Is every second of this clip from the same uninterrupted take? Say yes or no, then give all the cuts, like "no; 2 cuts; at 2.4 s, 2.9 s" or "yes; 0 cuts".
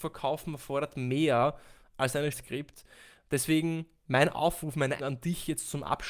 no; 2 cuts; at 2.3 s, 5.0 s